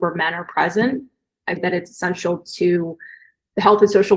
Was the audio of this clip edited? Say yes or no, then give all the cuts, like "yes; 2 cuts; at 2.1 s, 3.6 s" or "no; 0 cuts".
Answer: yes; 1 cut; at 1.6 s